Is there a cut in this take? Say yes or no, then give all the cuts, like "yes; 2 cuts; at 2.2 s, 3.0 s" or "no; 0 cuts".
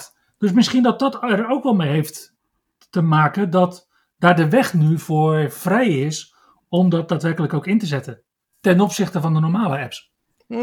no; 0 cuts